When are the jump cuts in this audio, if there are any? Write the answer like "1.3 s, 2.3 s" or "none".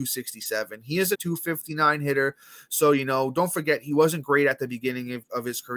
1.1 s

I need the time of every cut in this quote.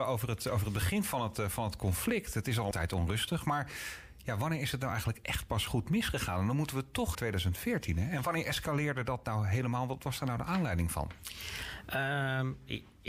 2.7 s, 7.1 s

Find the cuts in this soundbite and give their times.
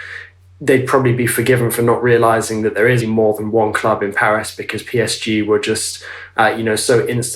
3.0 s

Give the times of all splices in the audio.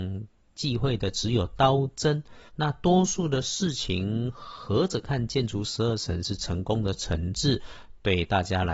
2.5 s

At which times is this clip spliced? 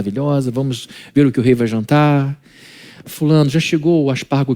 none

